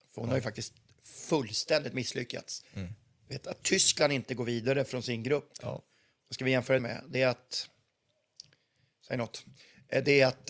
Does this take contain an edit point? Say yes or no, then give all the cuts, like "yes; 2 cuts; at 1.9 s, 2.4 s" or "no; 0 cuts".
yes; 1 cut; at 6.8 s